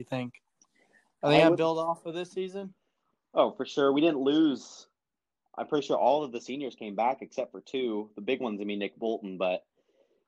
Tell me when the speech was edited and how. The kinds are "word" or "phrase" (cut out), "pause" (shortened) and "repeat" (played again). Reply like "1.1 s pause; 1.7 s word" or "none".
none

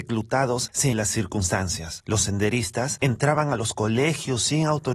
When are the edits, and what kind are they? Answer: 0.9 s phrase

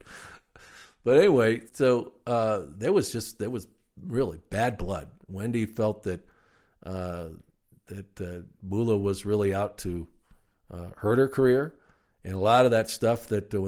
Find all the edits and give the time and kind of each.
1.7 s word; 8.6 s phrase

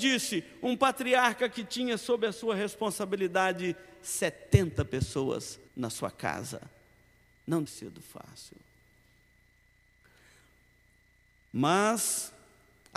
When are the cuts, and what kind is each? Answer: 5.7 s pause; 7.7 s phrase

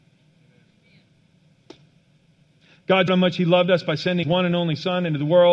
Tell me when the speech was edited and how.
3.1 s word; 4.2 s word

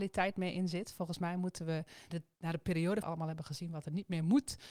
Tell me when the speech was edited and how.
2.1 s word; 3.0 s phrase

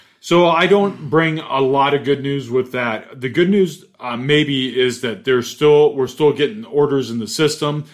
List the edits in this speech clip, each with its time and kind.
none

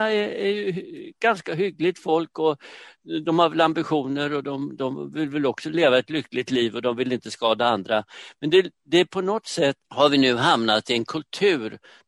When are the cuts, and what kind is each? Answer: 9.8 s pause

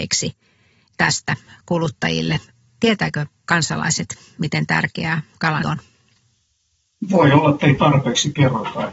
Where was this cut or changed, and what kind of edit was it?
5.6 s word

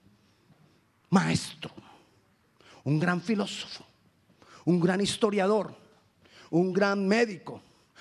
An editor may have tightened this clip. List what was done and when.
none

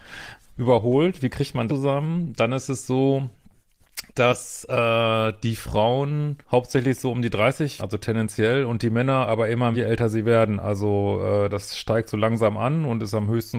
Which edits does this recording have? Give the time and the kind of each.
1.7 s word; 4.1 s pause; 6.4 s pause; 7.8 s word; 9.7 s word

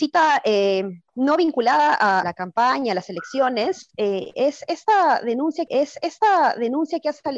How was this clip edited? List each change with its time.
1.1 s pause; 2.2 s word; 5.7 s repeat

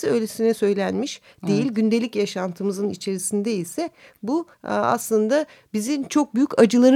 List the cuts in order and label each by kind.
4.5 s pause

